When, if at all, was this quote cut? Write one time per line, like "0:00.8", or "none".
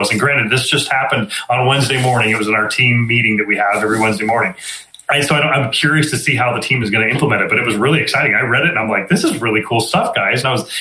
none

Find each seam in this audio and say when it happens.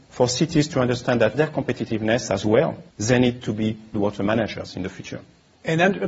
0:01.3
0:02.9
0:03.9

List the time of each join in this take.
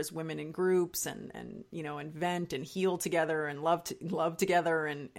none

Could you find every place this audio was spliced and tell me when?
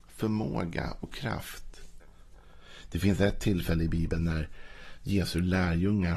none

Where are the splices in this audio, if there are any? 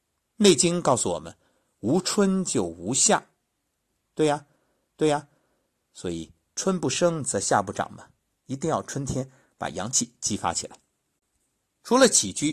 0:04.9

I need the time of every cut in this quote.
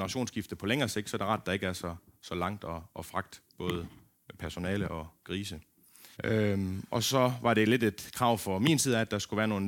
0:03.5
0:06.1

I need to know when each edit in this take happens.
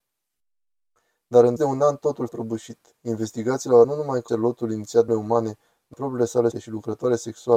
0:01.6
0:02.3
0:03.8
0:04.3
0:05.1
0:05.9
0:06.5

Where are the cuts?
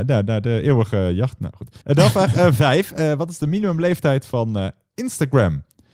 0:01.8

